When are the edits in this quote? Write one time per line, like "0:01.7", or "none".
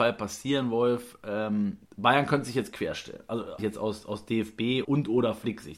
0:01.8
0:03.6
0:04.8